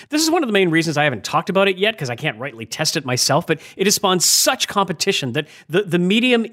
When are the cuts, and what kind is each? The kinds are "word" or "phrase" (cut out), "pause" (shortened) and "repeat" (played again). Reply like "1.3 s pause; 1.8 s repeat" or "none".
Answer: none